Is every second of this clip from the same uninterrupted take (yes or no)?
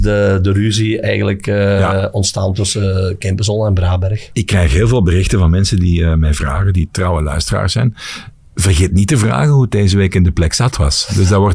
yes